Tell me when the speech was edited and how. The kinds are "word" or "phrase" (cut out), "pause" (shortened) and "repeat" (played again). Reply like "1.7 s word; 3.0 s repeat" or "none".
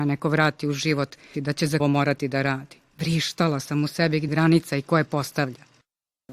1.3 s word; 1.8 s phrase; 2.9 s pause; 4.3 s word